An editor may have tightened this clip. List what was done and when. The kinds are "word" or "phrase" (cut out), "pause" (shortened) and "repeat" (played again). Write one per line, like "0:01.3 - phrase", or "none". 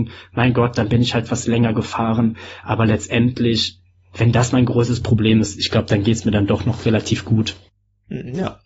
none